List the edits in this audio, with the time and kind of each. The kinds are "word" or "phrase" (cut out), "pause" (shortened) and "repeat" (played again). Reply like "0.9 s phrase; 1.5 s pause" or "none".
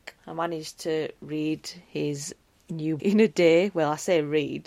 3.0 s word